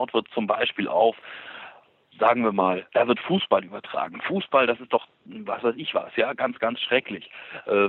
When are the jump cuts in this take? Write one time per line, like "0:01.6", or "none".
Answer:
0:02.9